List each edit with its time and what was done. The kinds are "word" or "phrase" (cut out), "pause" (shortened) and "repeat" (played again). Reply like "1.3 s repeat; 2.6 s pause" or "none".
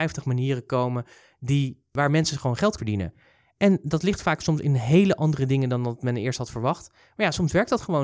2.8 s word